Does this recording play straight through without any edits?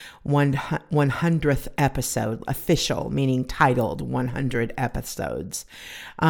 yes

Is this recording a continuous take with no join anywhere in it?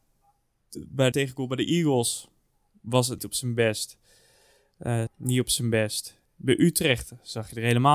no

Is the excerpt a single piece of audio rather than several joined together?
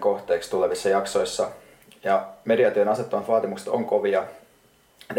yes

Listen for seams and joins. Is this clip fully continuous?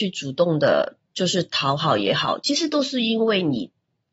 no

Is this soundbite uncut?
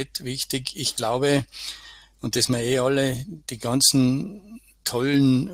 no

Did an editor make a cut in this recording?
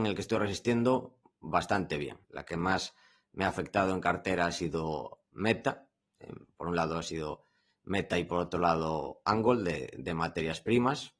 yes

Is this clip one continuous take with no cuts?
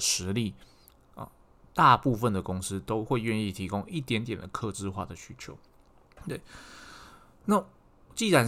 yes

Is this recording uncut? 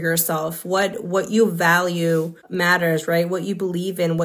no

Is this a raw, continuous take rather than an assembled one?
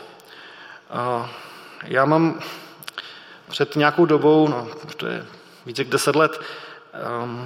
yes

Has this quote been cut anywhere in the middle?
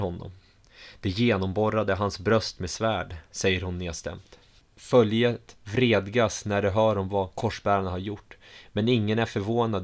no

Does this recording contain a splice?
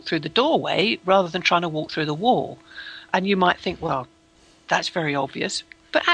no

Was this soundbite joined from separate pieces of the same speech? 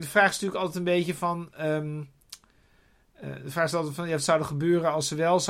no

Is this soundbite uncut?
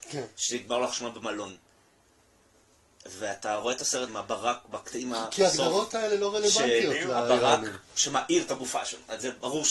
no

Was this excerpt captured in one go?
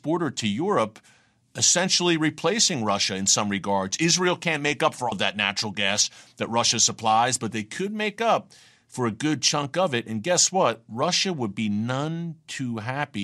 no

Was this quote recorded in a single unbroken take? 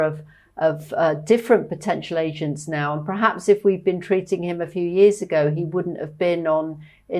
yes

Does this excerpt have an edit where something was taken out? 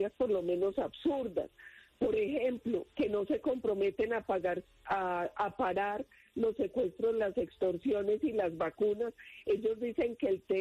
no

